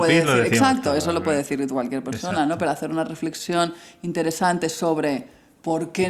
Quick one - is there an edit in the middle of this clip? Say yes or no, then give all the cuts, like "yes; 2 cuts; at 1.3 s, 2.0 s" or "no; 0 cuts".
no; 0 cuts